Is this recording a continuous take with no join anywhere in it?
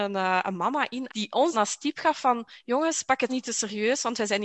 no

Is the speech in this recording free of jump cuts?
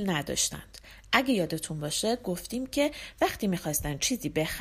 yes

